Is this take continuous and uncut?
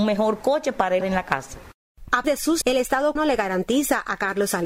no; 4 cuts; at 1.0 s, 2.2 s, 2.6 s, 3.2 s

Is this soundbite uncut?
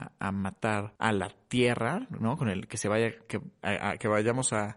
no; 1 cut; at 1.0 s

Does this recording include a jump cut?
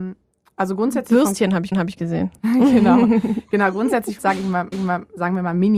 yes; 3 cuts; at 1.7 s, 4.2 s, 4.7 s

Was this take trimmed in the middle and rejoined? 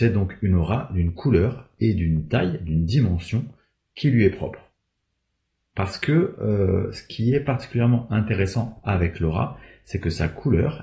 no; 0 cuts

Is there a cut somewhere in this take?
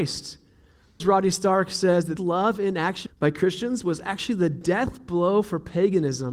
yes; 3 cuts; at 1.0 s, 2.2 s, 3.1 s

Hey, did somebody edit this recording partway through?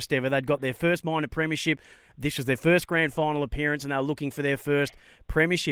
no; 0 cuts

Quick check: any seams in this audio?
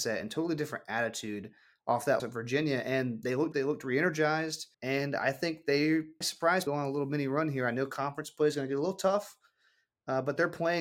yes; 5 cuts; at 2.2 s, 3.5 s, 4.7 s, 6.2 s, 6.7 s

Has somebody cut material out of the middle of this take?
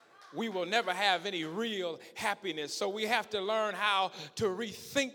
no; 0 cuts

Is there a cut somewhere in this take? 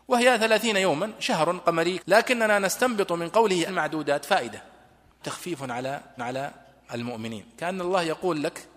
yes; 4 cuts; at 2.0 s, 3.7 s, 5.2 s, 6.2 s

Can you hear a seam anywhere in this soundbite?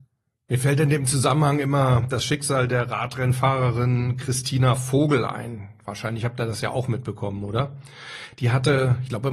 no; 0 cuts

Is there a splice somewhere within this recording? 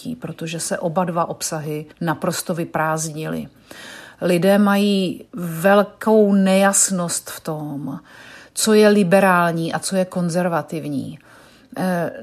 yes; 2 cuts; at 1.9 s, 5.3 s

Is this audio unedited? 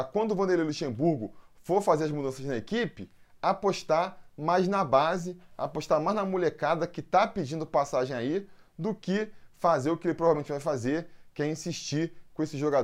yes; 0 cuts

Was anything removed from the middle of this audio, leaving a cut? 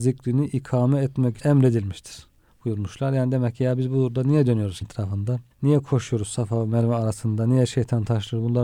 yes; 4 cuts; at 1.4 s, 2.5 s, 4.8 s, 5.5 s

